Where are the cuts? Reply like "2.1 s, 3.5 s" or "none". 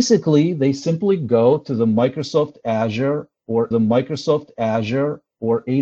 3.7 s